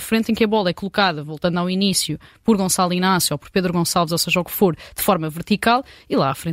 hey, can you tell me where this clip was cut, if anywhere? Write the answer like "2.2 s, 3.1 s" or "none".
none